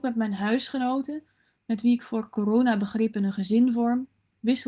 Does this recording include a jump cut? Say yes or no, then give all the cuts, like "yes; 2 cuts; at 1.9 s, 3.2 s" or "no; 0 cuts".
no; 0 cuts